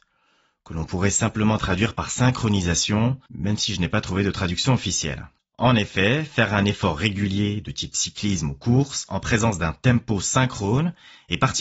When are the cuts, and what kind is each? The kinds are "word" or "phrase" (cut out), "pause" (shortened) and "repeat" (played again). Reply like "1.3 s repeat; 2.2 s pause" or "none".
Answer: 3.3 s pause; 5.4 s pause

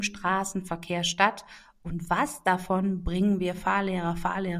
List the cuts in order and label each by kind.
none

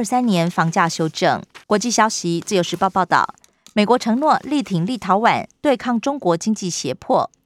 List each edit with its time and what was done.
1.6 s pause

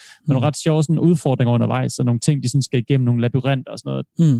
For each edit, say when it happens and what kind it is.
none

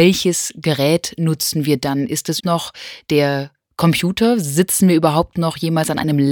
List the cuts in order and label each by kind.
2.4 s word

